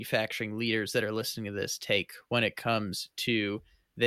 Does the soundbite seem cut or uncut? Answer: uncut